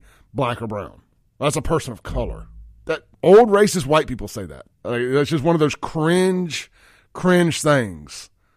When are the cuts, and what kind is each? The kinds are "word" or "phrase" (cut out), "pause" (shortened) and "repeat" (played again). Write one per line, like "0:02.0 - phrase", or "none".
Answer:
0:01.2 - pause
0:03.1 - pause
0:04.7 - pause